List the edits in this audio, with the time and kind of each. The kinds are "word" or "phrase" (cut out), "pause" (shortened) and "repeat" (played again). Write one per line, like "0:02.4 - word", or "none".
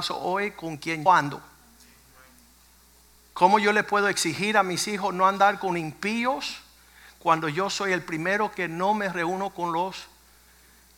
0:01.1 - word